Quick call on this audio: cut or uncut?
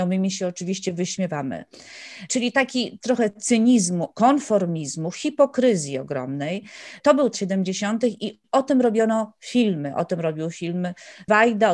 cut